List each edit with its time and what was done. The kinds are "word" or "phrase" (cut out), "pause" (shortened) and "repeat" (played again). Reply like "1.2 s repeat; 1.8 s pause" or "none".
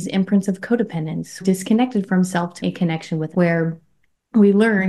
1.4 s phrase; 2.6 s word; 3.3 s word